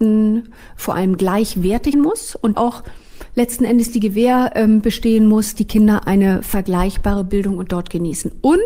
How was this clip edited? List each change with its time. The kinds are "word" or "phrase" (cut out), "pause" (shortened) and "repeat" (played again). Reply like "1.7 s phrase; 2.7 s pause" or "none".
1.9 s word; 2.5 s word; 5.5 s word; 7.7 s word